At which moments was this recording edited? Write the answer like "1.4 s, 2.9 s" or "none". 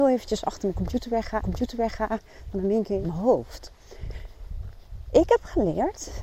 1.4 s, 3.0 s